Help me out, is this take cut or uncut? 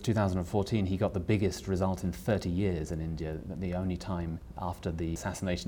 uncut